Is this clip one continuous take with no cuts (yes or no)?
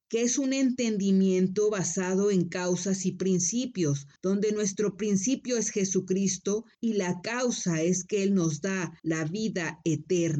no